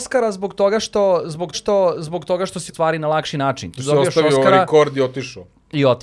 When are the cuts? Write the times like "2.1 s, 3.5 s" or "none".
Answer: 1.5 s, 2.7 s